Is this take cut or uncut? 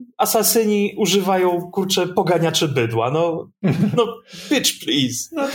uncut